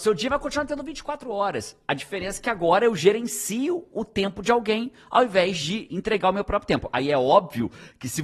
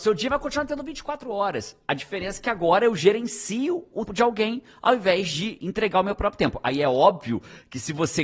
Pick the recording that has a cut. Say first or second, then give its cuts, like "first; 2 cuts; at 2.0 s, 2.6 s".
second; 1 cut; at 4.1 s